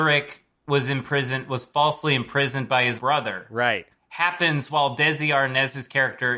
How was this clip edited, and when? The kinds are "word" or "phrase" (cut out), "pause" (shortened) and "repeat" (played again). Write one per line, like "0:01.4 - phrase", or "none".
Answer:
0:03.0 - word